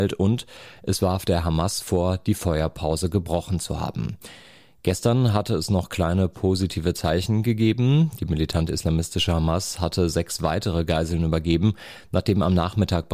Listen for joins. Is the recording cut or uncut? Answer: uncut